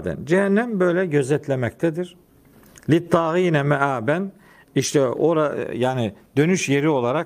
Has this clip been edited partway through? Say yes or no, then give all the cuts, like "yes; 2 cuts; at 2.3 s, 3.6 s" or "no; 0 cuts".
no; 0 cuts